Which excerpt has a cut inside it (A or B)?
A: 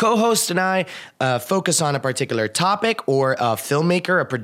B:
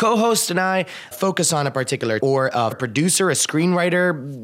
B